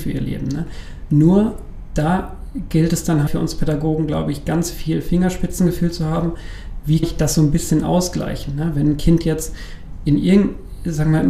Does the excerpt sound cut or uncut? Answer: cut